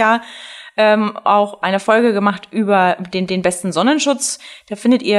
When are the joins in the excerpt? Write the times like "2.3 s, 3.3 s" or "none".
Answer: 3.3 s